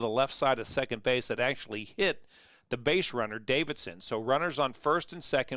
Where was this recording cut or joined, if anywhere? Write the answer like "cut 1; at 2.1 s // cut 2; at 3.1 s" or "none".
none